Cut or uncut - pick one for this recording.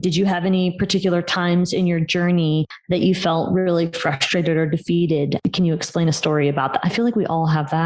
uncut